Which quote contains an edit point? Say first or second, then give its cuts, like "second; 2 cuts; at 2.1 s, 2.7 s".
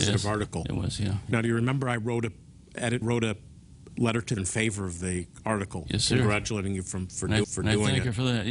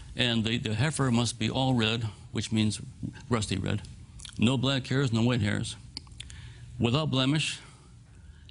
first; 4 cuts; at 3.0 s, 3.9 s, 4.4 s, 7.4 s